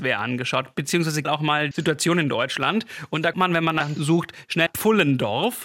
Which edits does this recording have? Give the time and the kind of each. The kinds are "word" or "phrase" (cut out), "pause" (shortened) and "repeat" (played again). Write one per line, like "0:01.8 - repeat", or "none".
0:01.2 - word
0:01.7 - word
0:03.3 - word
0:04.0 - phrase
0:04.7 - word